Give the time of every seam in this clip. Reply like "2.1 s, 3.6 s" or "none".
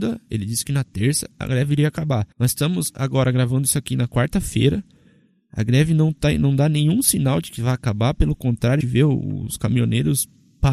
2.3 s, 8.8 s